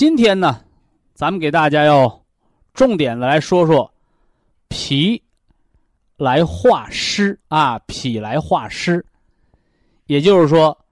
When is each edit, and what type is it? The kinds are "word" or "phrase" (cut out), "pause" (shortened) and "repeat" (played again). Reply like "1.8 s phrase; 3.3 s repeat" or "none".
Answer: 7.4 s pause